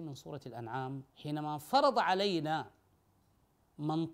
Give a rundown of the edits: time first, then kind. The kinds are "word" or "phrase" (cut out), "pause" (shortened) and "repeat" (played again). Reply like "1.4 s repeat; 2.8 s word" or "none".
1.1 s pause